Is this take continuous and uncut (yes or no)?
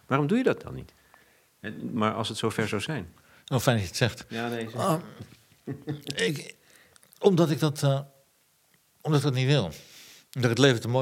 no